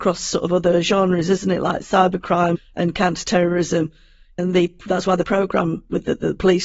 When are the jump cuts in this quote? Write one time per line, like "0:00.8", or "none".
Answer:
0:02.6
0:04.4
0:05.2

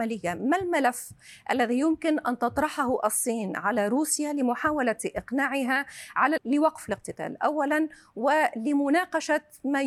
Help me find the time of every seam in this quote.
0:06.4

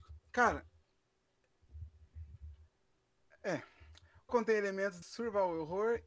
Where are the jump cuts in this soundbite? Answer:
0:04.3
0:05.0

